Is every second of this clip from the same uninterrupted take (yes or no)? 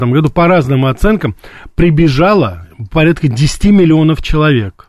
yes